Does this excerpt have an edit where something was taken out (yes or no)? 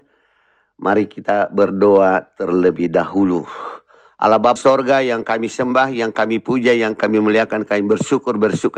yes